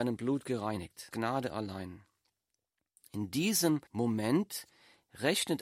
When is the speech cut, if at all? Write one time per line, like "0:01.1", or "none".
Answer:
0:01.1
0:03.9